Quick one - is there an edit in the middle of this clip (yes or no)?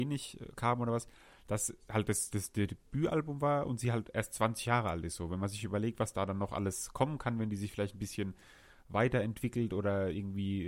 no